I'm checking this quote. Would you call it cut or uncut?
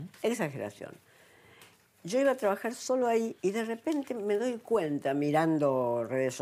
cut